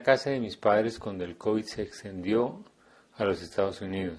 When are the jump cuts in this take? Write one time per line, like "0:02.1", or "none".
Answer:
none